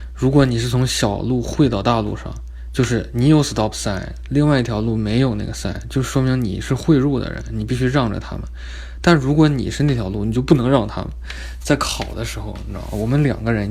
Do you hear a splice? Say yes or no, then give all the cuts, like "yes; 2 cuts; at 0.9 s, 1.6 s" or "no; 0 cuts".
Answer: no; 0 cuts